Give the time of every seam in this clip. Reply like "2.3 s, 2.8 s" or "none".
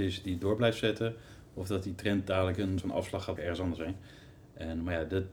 2.8 s, 3.4 s